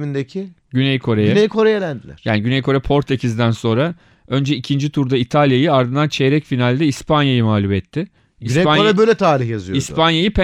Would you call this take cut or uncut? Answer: uncut